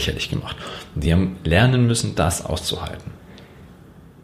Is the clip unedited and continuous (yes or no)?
yes